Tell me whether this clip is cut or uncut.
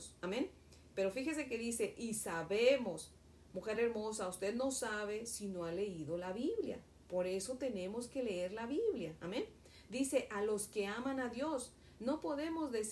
uncut